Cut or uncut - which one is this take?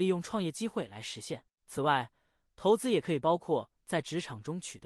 cut